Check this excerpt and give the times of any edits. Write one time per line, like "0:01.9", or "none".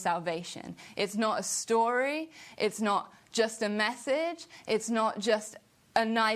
none